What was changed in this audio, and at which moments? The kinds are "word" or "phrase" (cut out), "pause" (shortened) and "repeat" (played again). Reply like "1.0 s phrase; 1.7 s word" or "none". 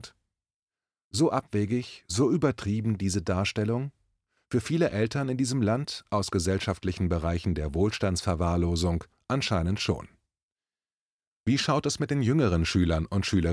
none